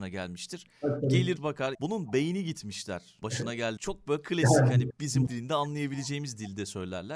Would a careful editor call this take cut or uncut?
cut